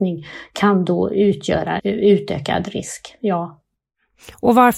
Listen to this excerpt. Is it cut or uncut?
cut